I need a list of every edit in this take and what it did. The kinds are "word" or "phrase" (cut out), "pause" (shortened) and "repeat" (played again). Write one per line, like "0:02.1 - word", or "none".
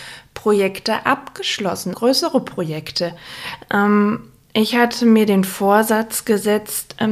0:01.9 - word